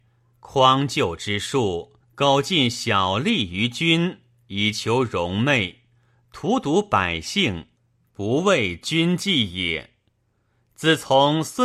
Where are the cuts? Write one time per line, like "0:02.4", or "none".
0:02.0